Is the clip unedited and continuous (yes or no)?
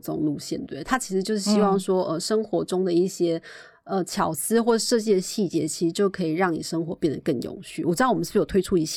yes